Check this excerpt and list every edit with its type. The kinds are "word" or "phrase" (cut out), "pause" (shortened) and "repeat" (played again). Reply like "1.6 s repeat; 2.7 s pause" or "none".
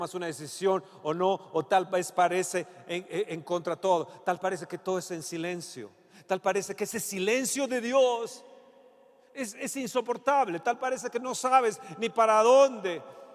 none